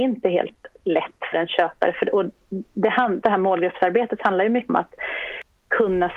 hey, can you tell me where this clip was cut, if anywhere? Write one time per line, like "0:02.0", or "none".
0:01.3
0:03.2
0:04.7